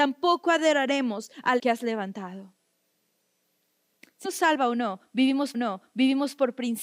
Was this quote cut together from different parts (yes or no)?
yes